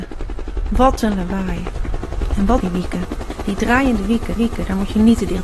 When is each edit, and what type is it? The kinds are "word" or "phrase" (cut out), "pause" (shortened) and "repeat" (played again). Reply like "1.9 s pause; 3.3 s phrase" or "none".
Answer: 2.6 s phrase; 4.4 s repeat